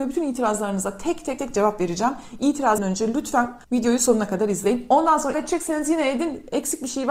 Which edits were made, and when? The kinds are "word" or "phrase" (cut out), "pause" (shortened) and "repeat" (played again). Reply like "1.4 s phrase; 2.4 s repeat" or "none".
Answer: 1.4 s word; 2.8 s word; 3.6 s pause; 5.3 s word

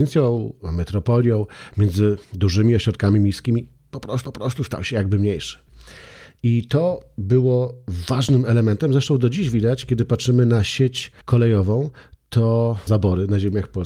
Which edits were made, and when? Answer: 2.2 s pause; 4.2 s repeat; 11.2 s pause; 12.9 s phrase

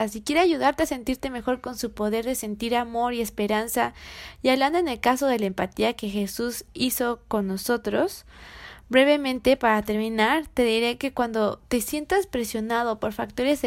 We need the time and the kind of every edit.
none

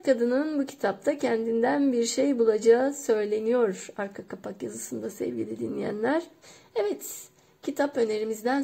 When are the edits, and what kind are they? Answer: 6.4 s pause

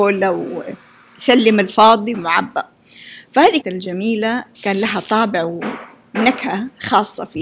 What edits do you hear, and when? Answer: 2.1 s word; 3.6 s phrase; 4.5 s word

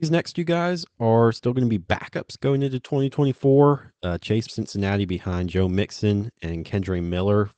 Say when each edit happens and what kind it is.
4.5 s phrase

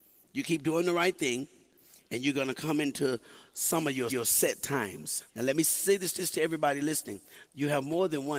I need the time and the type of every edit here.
4.1 s repeat; 5.3 s pause; 6.2 s repeat

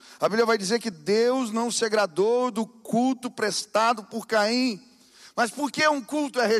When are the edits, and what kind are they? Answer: none

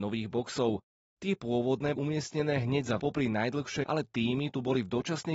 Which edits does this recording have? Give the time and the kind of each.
2.0 s word; 3.0 s word; 3.8 s word

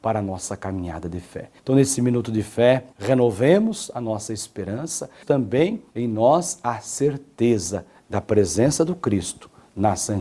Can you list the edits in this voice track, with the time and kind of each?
1.6 s pause; 2.9 s pause; 5.2 s word; 5.9 s pause; 8.0 s phrase

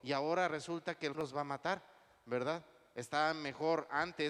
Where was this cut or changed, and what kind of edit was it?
1.1 s word

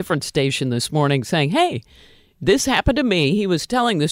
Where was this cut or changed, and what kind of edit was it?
none

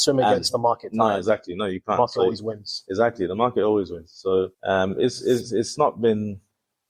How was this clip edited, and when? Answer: 4.5 s pause

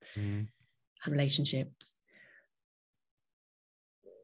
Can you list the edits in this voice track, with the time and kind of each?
1.0 s phrase

